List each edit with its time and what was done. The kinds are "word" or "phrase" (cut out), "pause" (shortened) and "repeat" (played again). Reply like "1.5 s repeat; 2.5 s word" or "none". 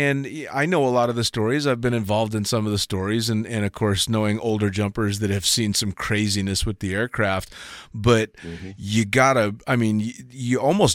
none

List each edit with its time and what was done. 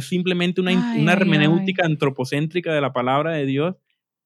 none

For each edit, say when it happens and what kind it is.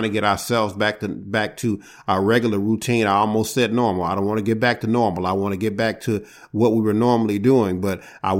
none

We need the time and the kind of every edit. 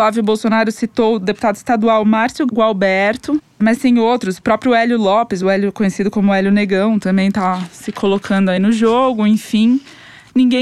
none

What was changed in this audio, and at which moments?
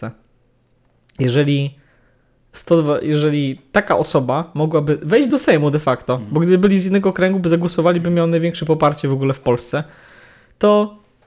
none

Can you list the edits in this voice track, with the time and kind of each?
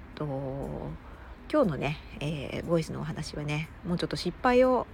none

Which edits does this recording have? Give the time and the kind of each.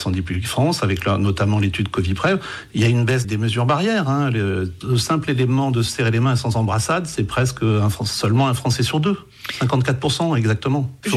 3.2 s word

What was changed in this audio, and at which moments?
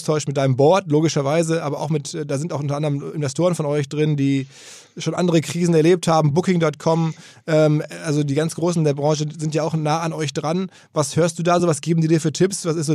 none

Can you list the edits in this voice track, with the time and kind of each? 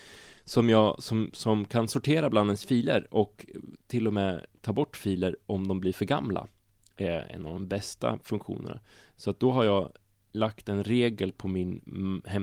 none

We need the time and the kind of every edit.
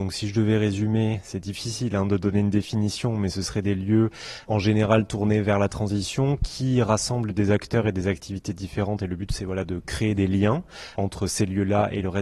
4.4 s word; 10.9 s word

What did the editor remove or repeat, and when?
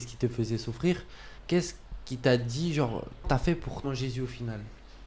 1.4 s pause; 3.2 s word; 3.8 s phrase

